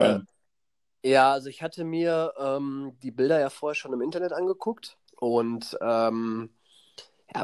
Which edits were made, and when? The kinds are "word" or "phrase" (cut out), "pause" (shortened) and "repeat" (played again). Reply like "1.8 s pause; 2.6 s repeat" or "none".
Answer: 5.1 s pause